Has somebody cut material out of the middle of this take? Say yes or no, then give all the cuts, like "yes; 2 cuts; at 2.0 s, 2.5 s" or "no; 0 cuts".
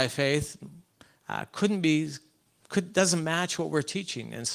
no; 0 cuts